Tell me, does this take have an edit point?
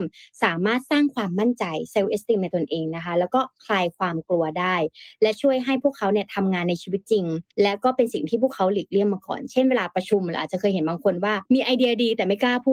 yes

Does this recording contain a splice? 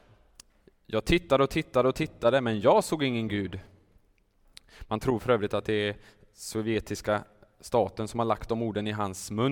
no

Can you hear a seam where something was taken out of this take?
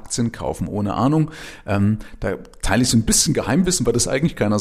no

